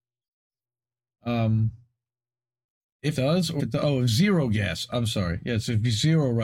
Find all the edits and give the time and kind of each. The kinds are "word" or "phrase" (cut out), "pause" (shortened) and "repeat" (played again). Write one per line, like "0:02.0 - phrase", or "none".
0:03.1 - word
0:03.6 - word